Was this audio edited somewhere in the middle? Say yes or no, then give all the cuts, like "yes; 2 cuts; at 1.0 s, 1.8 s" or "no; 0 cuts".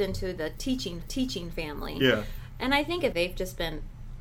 yes; 2 cuts; at 1.0 s, 3.1 s